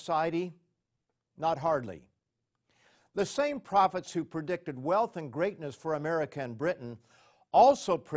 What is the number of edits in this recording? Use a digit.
0